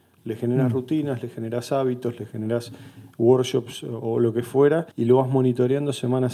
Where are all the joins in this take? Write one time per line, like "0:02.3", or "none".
0:04.9